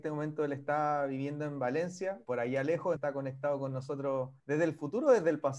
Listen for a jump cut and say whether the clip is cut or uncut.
cut